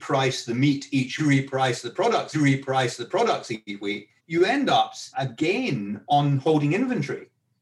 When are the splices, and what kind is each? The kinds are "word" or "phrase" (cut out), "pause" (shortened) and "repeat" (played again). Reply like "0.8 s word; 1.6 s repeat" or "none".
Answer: 1.2 s phrase; 2.3 s repeat; 4.2 s pause; 5.1 s word